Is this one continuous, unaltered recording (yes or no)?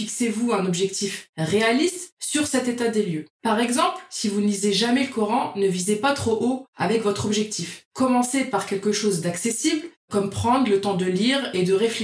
yes